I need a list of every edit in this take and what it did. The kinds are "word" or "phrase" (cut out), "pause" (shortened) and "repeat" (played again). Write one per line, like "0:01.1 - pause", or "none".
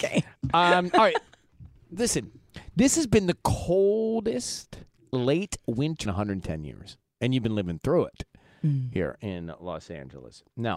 0:06.0 - phrase